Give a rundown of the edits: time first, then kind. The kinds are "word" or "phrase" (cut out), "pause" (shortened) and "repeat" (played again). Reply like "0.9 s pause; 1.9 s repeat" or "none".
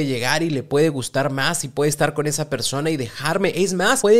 none

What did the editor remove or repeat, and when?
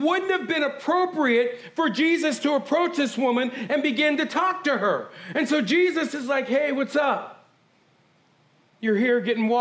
none

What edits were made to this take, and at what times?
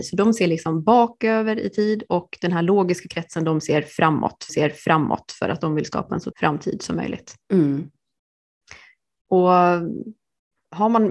4.5 s repeat; 6.3 s word

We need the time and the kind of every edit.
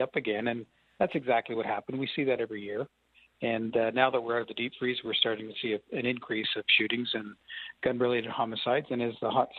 none

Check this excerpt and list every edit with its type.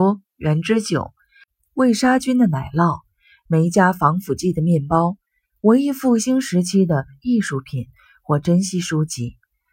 none

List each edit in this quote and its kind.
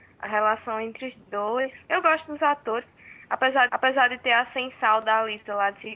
1.8 s pause; 3.7 s repeat

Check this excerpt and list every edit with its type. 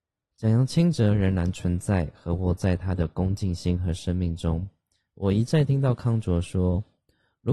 none

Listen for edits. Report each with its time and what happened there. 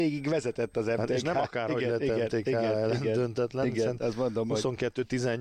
none

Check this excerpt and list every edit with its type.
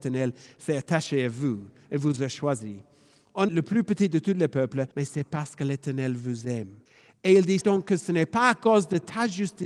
3.5 s phrase; 4.9 s pause; 6.9 s pause; 7.6 s word

